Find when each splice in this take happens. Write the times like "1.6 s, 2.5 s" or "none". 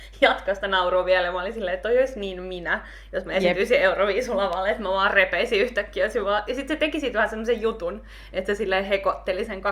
none